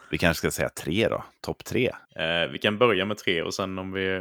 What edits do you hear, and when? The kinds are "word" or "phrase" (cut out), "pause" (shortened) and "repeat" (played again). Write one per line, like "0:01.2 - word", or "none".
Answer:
0:02.0 - pause